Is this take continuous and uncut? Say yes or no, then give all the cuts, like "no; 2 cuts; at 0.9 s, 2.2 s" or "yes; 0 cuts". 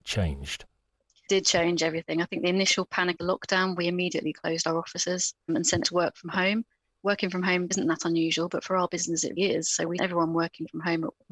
no; 7 cuts; at 1.3 s, 3.2 s, 5.5 s, 5.8 s, 7.7 s, 9.4 s, 10.0 s